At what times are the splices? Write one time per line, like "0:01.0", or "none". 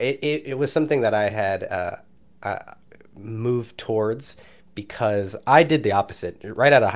none